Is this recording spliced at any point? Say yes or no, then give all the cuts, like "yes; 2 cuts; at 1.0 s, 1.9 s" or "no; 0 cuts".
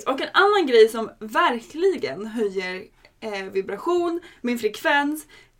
no; 0 cuts